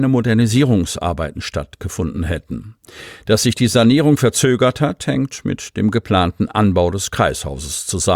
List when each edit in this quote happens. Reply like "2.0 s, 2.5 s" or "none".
none